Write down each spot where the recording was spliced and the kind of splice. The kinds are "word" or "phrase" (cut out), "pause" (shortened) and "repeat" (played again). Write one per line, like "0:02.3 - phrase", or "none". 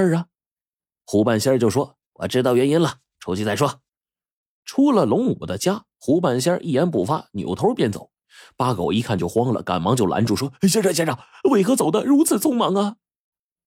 0:03.9 - pause